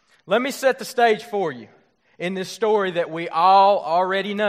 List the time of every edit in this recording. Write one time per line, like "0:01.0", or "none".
none